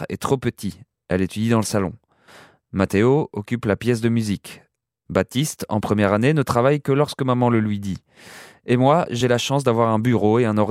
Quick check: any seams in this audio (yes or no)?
no